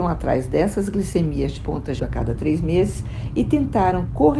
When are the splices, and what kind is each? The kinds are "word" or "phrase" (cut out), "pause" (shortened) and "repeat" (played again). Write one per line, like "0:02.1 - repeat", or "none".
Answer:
0:01.6 - word
0:02.0 - word